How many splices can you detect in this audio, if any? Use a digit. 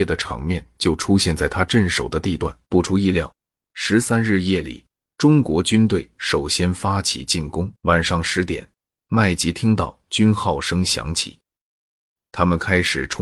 2